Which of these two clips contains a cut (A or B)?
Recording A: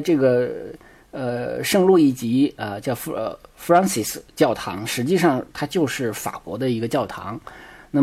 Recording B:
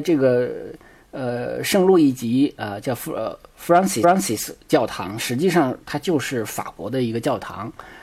B